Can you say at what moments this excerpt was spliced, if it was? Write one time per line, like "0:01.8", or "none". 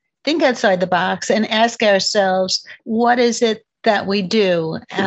0:02.8

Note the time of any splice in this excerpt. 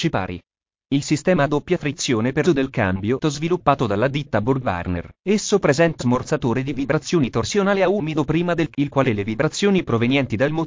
0:02.4
0:03.2
0:05.1
0:06.0
0:08.7
0:09.0

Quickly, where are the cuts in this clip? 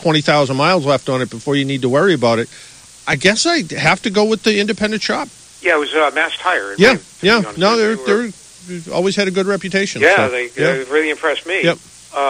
none

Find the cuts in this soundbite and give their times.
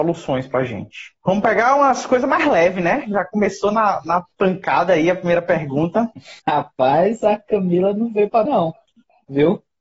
0:01.2
0:06.4
0:08.4

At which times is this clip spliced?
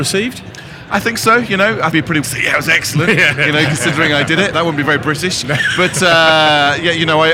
0:01.9
0:02.2
0:04.5

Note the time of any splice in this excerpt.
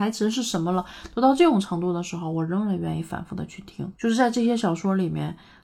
0:03.9

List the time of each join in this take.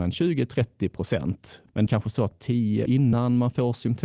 0:01.9
0:02.3
0:02.9

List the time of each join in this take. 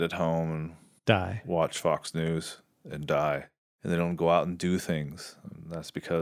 none

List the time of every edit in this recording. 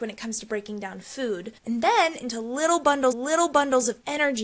0:01.6
0:02.2
0:03.1

